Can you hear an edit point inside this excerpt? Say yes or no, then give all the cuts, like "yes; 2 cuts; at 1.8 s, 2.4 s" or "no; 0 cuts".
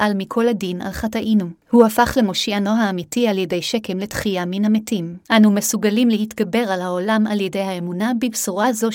yes; 2 cuts; at 1.6 s, 5.2 s